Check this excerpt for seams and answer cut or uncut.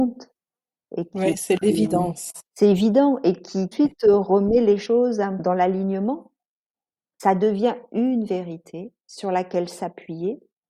cut